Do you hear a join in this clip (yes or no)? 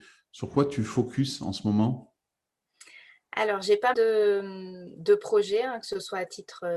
yes